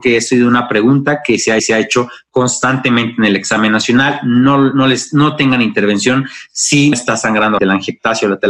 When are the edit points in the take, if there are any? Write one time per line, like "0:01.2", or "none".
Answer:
0:01.6
0:06.9
0:07.6